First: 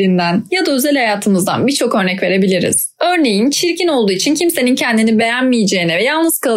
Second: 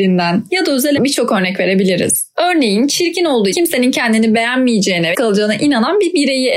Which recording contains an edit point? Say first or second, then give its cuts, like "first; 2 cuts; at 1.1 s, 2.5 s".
second; 3 cuts; at 1.0 s, 3.5 s, 5.1 s